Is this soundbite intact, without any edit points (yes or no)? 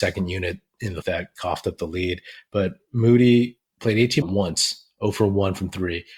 no